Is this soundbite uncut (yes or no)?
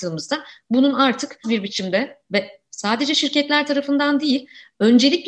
no